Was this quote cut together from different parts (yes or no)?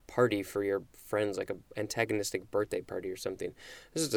no